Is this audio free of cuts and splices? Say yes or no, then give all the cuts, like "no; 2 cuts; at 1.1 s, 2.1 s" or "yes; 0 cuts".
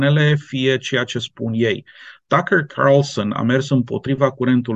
yes; 0 cuts